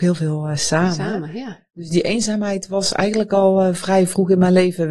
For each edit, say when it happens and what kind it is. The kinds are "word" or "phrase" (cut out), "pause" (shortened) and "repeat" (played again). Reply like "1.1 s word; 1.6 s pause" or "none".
none